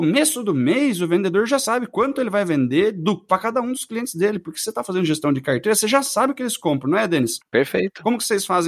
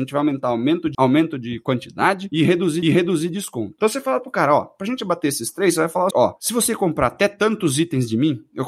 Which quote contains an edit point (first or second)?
second